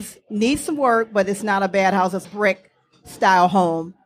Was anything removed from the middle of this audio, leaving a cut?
yes; 1 cut; at 2.2 s

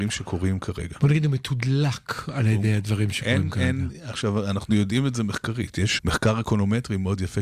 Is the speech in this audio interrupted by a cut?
yes; 1 cut; at 6.0 s

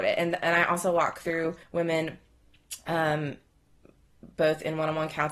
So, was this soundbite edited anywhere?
yes; 1 cut; at 1.6 s

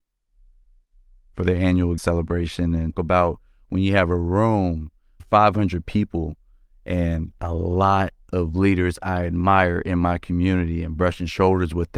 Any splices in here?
yes; 3 cuts; at 2.0 s, 2.9 s, 5.2 s

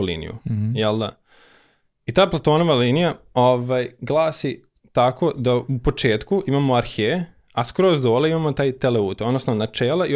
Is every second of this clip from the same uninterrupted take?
yes; 0 cuts

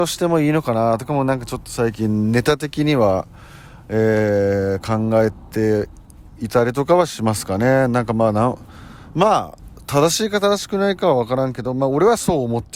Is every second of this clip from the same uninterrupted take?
yes; 0 cuts

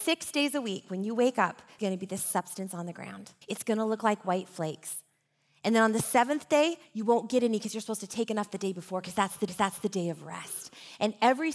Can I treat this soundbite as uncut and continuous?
no; 3 cuts; at 1.8 s, 3.4 s, 9.5 s

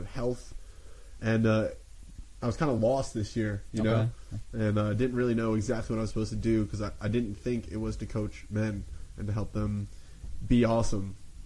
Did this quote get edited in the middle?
no; 0 cuts

